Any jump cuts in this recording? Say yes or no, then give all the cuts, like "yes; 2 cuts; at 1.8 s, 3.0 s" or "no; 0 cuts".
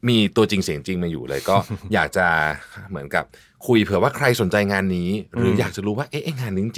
no; 0 cuts